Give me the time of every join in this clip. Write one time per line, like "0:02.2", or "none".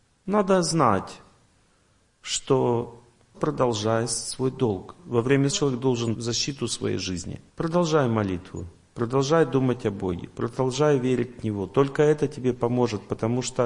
0:03.3
0:05.5
0:06.1
0:07.5